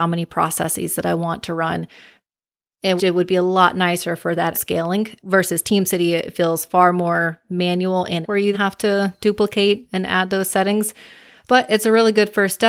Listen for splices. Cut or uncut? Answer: cut